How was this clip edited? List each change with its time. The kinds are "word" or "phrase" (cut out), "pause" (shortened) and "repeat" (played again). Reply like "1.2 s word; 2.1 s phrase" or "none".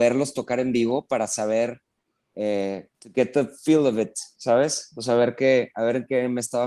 2.9 s pause